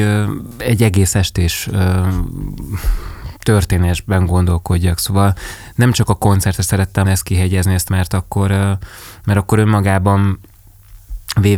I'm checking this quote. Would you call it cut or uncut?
cut